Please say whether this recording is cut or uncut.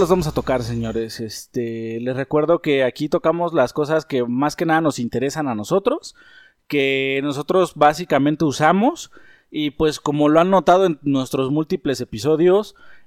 uncut